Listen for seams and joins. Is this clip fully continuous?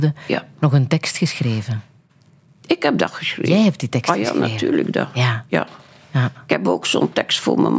yes; 0 cuts

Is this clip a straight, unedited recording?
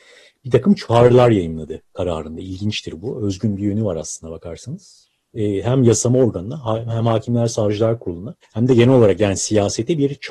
no; 1 cut; at 8.4 s

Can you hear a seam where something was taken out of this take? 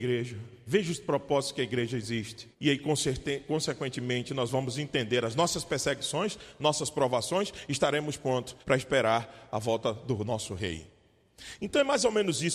yes; 2 cuts; at 2.5 s, 8.6 s

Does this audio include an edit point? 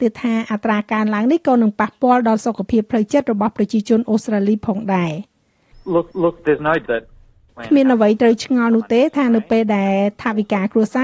yes; 2 cuts; at 6.1 s, 6.9 s

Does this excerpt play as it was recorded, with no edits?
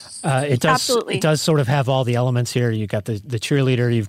yes; 0 cuts

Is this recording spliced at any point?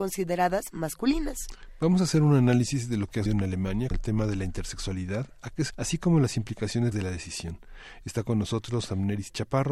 yes; 4 cuts; at 3.3 s, 3.9 s, 5.7 s, 6.9 s

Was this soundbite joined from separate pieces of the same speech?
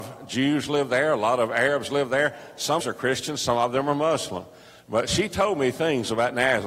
yes; 1 cut; at 2.8 s

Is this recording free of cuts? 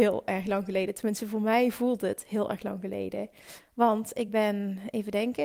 yes; 0 cuts

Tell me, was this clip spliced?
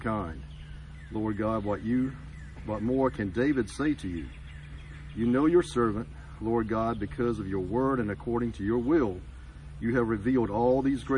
no; 0 cuts

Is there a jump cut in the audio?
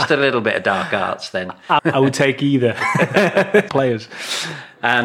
yes; 2 cuts; at 1.8 s, 3.7 s

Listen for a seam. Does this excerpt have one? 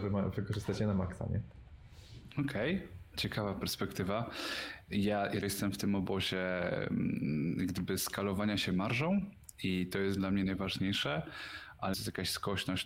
yes; 2 cuts; at 5.4 s, 11.9 s

